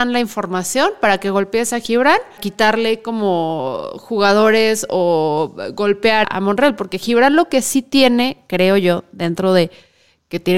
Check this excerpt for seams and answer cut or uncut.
cut